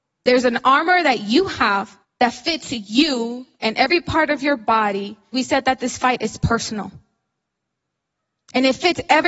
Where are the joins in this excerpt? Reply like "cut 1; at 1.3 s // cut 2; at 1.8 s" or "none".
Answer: cut 1; at 2.0 s // cut 2; at 3.5 s // cut 3; at 5.3 s